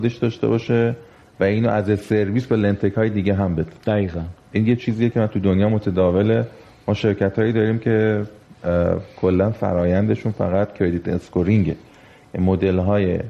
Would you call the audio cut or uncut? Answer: uncut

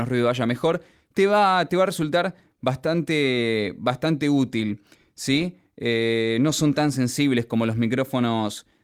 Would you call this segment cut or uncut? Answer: uncut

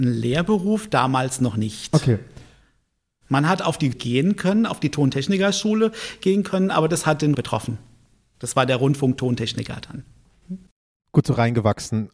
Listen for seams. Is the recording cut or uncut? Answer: cut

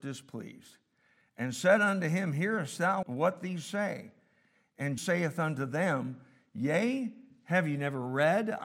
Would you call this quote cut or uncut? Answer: cut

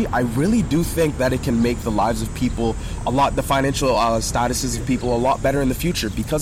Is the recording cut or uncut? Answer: uncut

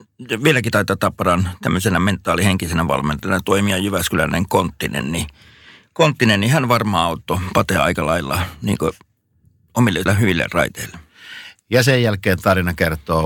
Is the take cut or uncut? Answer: cut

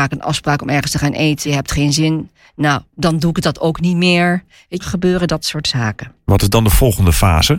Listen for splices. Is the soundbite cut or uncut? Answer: cut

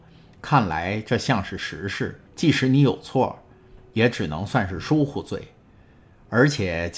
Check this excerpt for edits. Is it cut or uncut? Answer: cut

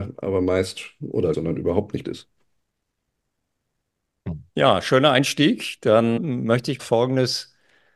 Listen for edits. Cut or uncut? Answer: cut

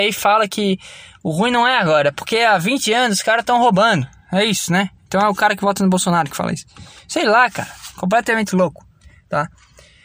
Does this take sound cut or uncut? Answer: uncut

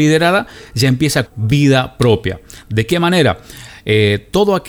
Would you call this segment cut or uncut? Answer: cut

